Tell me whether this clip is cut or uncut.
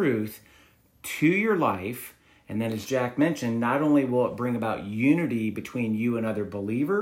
uncut